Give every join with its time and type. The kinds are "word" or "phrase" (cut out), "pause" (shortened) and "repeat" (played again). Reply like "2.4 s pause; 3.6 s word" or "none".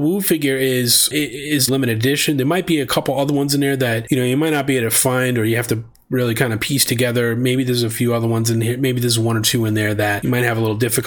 1.7 s word